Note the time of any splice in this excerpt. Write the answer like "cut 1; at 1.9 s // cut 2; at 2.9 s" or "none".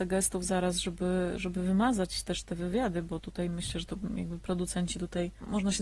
none